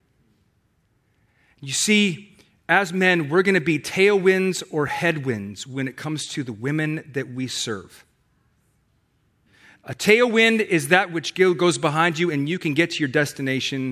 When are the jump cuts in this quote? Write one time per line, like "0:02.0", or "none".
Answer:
none